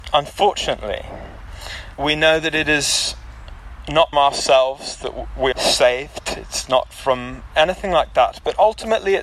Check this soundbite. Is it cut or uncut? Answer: cut